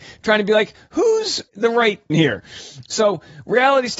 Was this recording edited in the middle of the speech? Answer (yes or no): yes